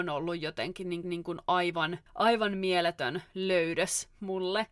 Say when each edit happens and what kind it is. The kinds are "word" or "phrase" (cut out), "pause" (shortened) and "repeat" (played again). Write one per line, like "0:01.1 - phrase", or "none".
0:01.0 - repeat
0:02.1 - pause